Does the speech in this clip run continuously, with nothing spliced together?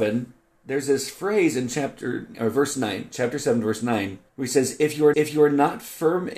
no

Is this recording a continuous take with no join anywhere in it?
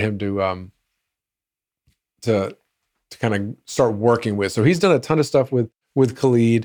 yes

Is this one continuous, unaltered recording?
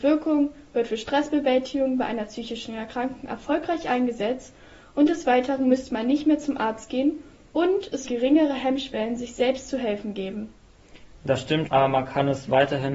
no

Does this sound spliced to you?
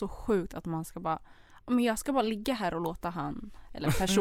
no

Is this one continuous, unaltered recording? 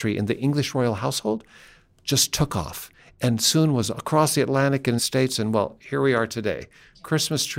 no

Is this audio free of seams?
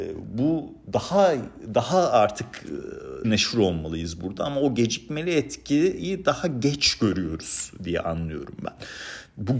no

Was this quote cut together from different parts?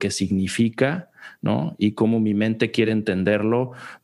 no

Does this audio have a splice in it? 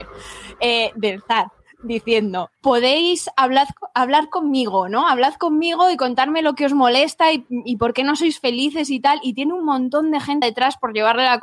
yes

